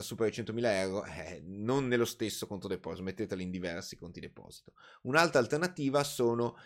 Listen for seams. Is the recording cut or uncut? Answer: uncut